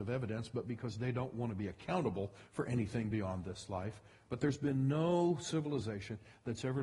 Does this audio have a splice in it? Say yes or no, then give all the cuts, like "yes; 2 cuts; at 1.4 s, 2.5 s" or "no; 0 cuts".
no; 0 cuts